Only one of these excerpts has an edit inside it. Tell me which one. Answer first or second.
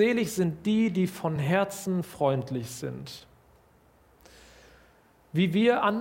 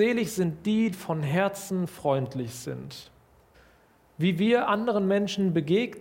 second